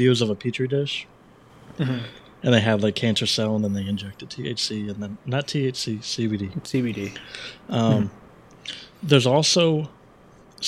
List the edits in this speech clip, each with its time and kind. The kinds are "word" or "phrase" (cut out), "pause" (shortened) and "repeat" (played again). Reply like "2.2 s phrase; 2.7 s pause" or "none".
none